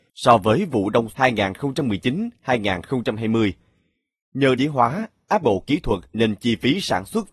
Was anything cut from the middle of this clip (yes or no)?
yes